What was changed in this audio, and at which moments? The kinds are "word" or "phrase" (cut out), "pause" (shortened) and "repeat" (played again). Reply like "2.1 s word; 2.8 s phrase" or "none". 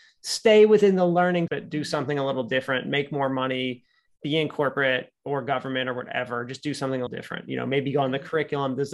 1.5 s word; 5.2 s pause; 7.1 s word